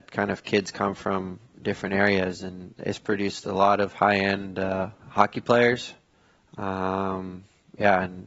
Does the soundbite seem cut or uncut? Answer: cut